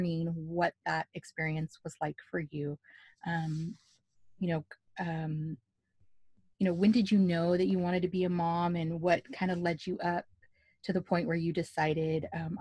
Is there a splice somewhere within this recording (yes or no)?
no